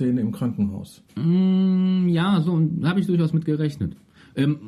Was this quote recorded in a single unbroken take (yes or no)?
no